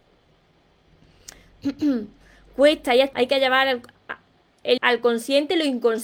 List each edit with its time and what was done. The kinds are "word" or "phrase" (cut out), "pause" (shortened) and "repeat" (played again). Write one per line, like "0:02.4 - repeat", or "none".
0:03.1 - word
0:03.9 - word
0:04.8 - word